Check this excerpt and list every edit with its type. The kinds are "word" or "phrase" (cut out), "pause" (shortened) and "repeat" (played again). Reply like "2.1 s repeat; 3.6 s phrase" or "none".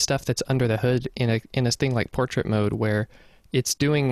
none